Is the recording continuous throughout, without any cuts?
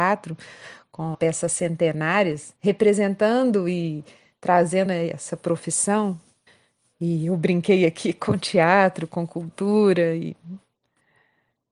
no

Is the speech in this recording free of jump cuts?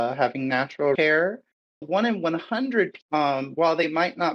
no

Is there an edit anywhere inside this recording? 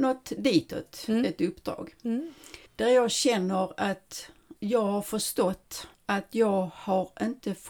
yes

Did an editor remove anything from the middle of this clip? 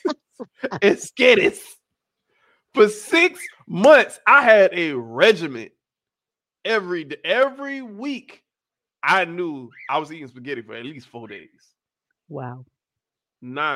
no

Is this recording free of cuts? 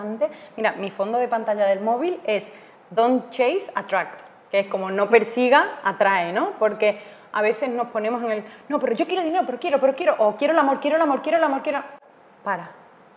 yes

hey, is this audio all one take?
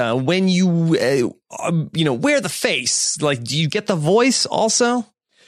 yes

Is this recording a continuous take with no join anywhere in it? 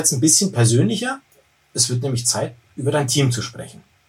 yes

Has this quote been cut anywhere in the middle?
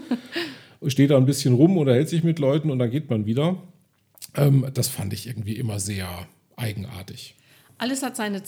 no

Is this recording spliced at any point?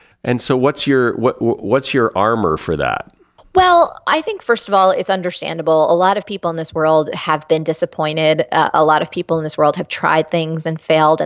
no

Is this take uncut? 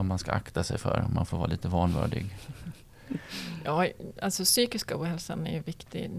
yes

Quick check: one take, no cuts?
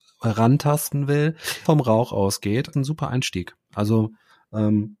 no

